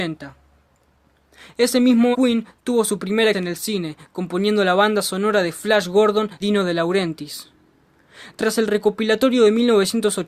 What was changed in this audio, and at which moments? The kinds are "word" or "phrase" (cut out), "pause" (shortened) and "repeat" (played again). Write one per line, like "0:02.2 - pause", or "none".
0:02.1 - word
0:03.3 - word
0:06.4 - word

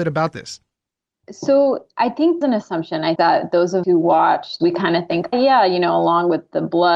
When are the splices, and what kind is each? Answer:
0:02.4 - phrase
0:03.2 - word
0:03.8 - word
0:04.6 - phrase
0:05.3 - word

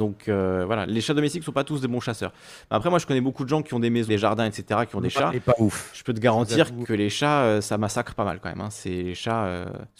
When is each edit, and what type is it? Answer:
0:04.1 - word
0:06.8 - word

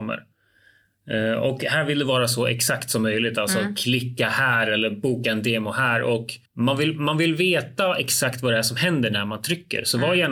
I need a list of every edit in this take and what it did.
0:06.5 - pause

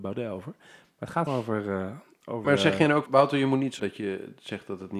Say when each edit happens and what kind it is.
0:01.3 - word
0:02.4 - word
0:03.1 - word
0:03.8 - word

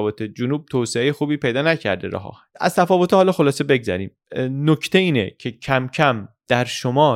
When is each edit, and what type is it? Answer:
none

